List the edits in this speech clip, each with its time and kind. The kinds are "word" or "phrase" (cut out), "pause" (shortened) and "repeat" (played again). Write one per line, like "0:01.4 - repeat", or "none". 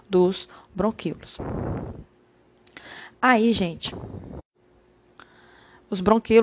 0:03.1 - pause